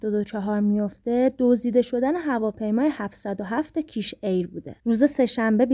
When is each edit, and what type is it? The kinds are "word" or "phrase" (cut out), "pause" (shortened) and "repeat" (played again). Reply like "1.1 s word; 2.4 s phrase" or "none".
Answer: 4.8 s pause